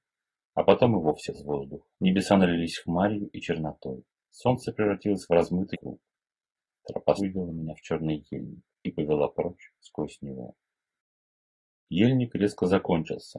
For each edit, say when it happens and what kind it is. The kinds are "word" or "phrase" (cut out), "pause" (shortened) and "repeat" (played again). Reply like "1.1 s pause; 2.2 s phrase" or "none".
1.3 s word; 1.9 s pause; 4.1 s pause; 5.7 s word; 7.2 s word; 8.7 s pause